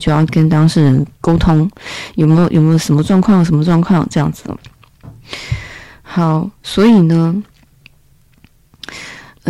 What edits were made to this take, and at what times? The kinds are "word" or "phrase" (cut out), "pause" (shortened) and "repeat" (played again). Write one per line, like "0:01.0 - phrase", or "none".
0:01.1 - pause
0:06.5 - pause